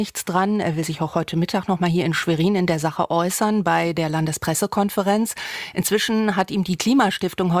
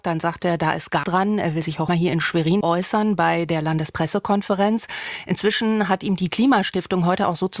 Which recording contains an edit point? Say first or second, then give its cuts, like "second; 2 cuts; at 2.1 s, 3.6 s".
second; 3 cuts; at 1.0 s, 1.9 s, 2.6 s